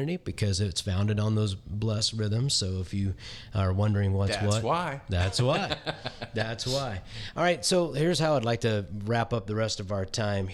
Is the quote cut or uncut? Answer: uncut